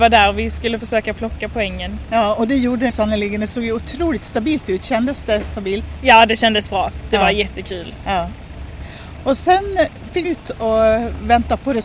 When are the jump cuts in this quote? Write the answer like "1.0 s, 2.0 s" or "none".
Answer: 2.9 s, 10.2 s